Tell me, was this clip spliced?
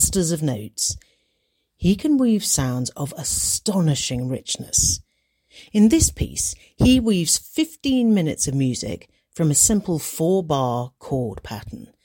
no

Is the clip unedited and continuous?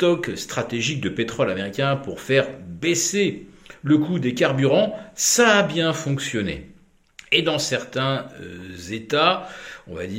yes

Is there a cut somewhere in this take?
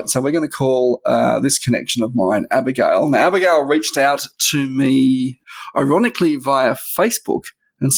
no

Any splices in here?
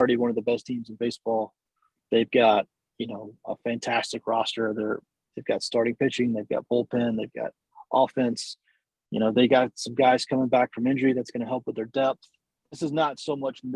no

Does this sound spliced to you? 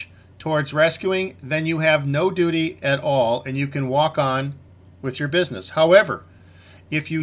no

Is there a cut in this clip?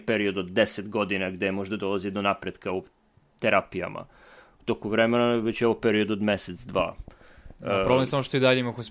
no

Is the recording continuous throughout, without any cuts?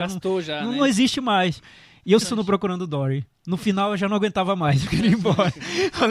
no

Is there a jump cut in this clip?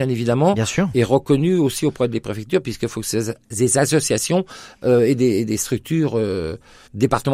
no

